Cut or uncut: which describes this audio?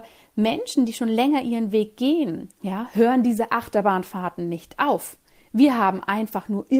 uncut